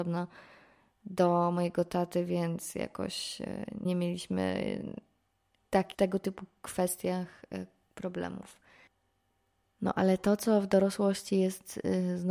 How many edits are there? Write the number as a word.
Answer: two